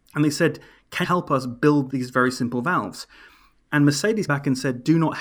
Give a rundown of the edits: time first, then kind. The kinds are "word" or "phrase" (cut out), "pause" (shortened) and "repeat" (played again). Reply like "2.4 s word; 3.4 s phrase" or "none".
1.0 s word; 1.9 s word; 4.3 s word